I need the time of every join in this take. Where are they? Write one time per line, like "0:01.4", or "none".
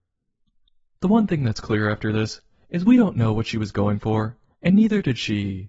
none